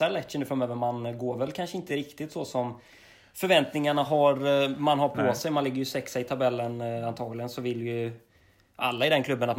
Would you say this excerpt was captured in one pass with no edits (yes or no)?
yes